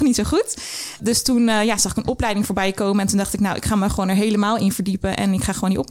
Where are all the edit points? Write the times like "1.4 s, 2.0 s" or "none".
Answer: none